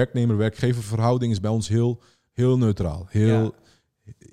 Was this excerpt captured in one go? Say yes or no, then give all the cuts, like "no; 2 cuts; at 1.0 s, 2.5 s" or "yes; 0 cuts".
yes; 0 cuts